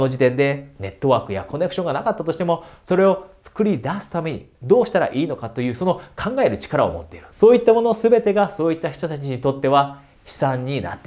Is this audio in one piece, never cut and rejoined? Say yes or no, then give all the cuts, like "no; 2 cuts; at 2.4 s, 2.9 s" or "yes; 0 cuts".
no; 2 cuts; at 4.5 s, 7.3 s